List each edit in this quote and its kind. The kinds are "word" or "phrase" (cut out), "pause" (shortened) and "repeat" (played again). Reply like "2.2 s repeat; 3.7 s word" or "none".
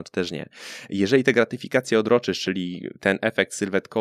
none

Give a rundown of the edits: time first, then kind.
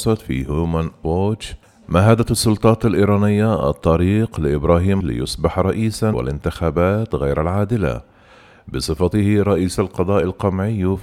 1.0 s word; 1.6 s pause; 5.0 s word; 6.1 s phrase

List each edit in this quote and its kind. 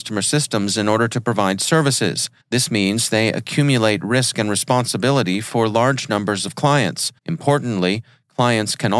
2.4 s pause; 7.2 s pause

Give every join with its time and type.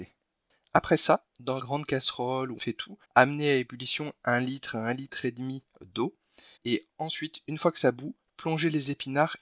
1.6 s word; 2.6 s word; 3.0 s pause; 6.6 s pause

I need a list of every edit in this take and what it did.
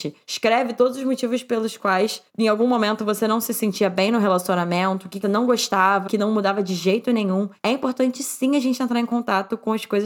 5.2 s word; 6.1 s word

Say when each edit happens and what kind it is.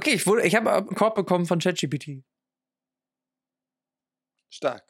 0.9 s word

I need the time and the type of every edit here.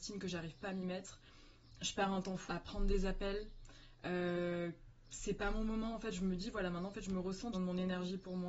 2.5 s word; 7.5 s phrase

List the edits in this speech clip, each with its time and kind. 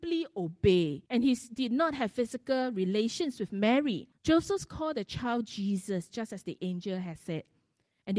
1.1 s pause; 4.1 s pause

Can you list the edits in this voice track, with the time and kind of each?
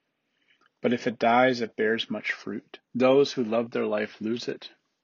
2.8 s pause

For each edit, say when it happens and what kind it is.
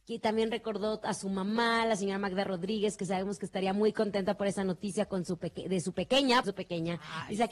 6.4 s phrase

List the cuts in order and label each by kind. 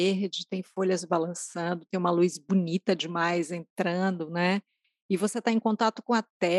none

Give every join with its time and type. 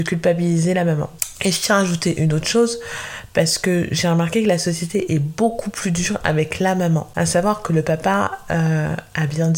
none

